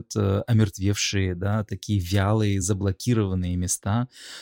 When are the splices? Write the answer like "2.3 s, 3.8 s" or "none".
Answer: none